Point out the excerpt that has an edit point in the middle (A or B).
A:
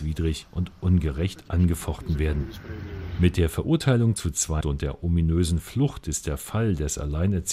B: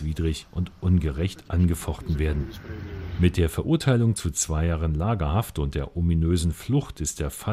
A